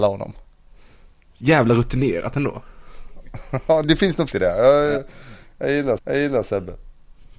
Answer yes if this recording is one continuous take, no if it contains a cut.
no